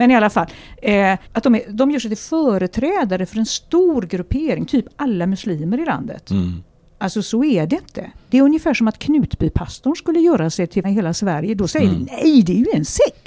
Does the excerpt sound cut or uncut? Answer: cut